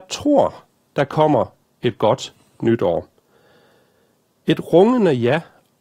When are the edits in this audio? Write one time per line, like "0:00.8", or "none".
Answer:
none

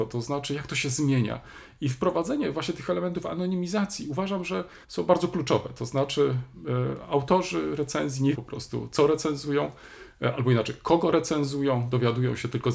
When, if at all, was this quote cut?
0:04.8
0:08.3

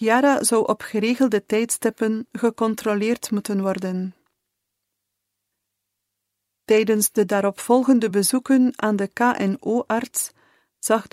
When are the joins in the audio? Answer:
none

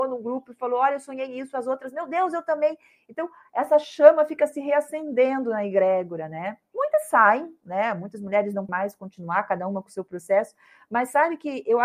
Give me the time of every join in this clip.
0:08.7

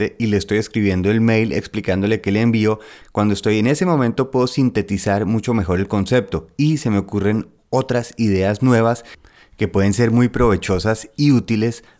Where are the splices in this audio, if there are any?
none

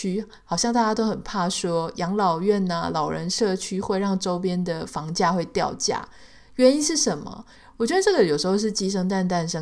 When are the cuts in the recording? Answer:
none

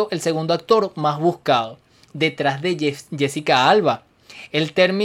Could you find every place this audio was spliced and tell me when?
none

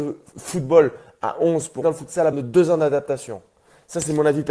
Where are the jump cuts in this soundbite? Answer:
0:01.8
0:02.3

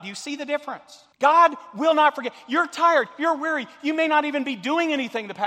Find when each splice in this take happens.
0:01.1

